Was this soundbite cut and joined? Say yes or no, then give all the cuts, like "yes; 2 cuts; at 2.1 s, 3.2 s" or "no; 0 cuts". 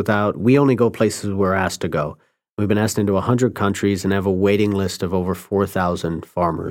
no; 0 cuts